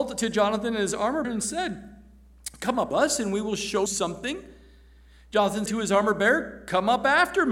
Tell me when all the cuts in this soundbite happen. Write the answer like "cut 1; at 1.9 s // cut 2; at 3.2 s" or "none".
cut 1; at 1.2 s // cut 2; at 2.9 s // cut 3; at 3.9 s // cut 4; at 5.7 s